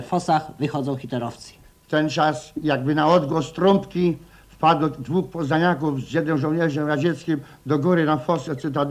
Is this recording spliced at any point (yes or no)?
no